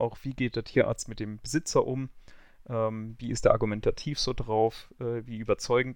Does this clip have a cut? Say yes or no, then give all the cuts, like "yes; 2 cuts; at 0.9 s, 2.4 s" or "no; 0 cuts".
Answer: no; 0 cuts